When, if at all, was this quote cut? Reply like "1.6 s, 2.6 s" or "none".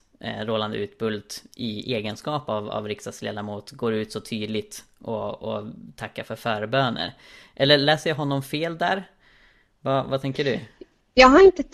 none